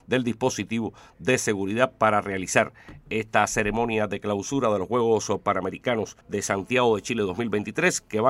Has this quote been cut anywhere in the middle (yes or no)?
yes